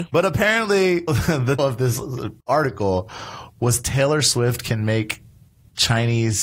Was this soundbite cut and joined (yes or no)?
yes